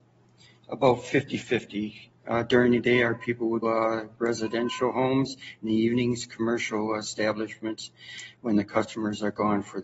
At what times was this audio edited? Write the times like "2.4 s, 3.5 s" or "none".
3.6 s